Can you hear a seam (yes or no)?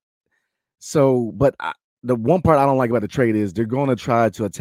no